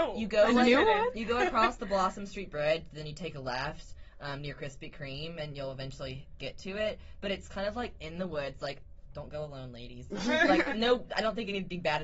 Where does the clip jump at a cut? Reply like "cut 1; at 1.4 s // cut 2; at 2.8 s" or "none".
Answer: none